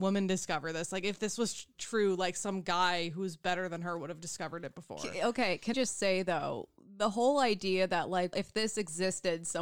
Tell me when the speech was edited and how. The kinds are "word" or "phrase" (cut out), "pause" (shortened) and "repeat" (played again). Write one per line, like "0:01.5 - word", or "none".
0:05.7 - word
0:08.3 - word